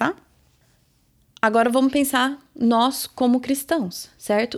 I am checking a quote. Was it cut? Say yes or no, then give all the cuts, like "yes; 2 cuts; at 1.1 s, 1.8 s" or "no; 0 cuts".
no; 0 cuts